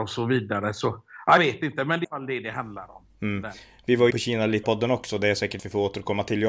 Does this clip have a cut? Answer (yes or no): yes